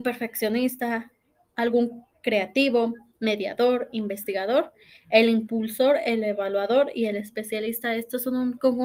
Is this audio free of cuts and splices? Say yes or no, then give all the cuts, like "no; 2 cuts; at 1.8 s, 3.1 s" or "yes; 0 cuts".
yes; 0 cuts